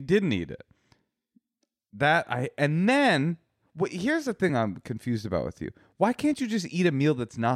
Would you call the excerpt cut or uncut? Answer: uncut